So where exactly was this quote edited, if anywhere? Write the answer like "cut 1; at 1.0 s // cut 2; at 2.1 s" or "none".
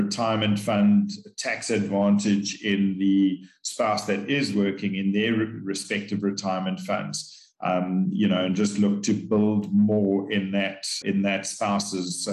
cut 1; at 11.0 s

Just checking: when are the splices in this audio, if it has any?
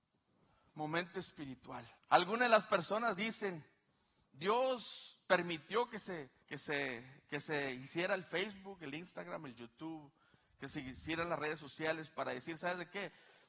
cut 1; at 2.0 s // cut 2; at 6.4 s

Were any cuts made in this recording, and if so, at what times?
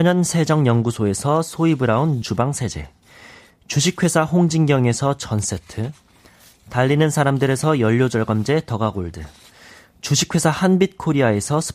cut 1; at 2.2 s

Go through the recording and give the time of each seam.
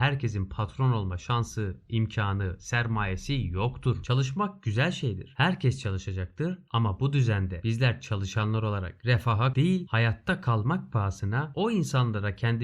cut 1; at 9.5 s

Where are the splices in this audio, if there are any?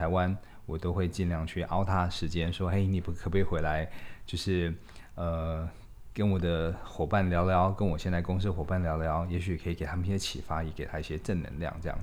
none

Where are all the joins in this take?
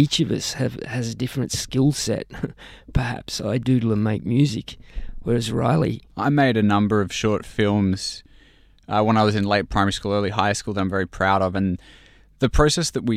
cut 1; at 6.1 s

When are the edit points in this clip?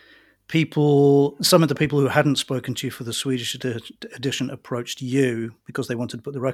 cut 1; at 5.6 s

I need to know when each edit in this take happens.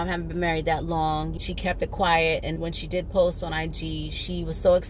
cut 1; at 1.4 s // cut 2; at 2.6 s

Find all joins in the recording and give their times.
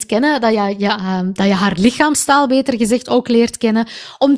none

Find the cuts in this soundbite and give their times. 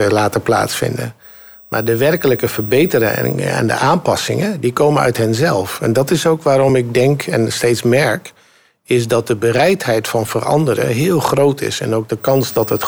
none

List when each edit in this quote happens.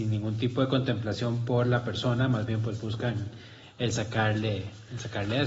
none

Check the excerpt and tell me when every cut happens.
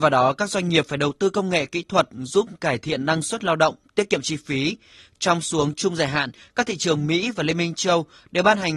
none

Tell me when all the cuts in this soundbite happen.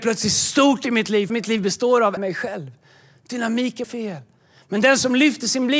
cut 1; at 1.3 s // cut 2; at 2.2 s // cut 3; at 3.8 s

